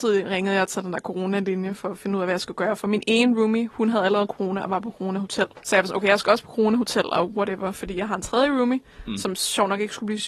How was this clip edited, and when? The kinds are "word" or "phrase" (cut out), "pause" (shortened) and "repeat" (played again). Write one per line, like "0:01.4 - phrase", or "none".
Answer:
0:05.6 - pause